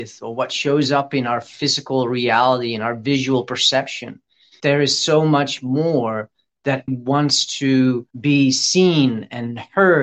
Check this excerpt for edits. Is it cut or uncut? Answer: cut